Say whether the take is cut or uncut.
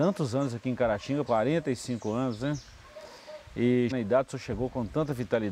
cut